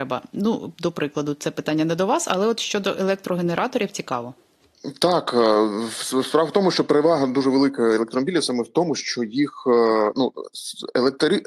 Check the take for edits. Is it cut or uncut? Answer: uncut